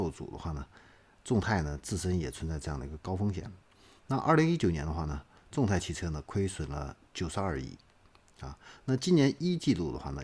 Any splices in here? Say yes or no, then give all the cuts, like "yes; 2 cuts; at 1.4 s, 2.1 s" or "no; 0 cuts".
no; 0 cuts